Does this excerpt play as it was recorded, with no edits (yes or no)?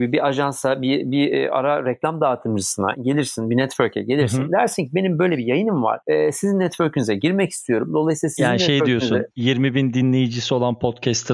yes